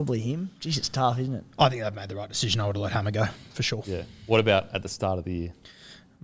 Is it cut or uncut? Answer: uncut